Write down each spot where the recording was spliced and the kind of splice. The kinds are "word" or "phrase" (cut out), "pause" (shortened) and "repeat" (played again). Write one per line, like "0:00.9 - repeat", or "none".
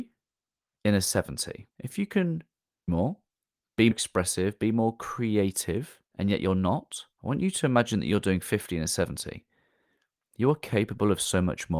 0:01.7 - pause
0:02.9 - word
0:03.9 - phrase
0:06.1 - pause
0:07.1 - pause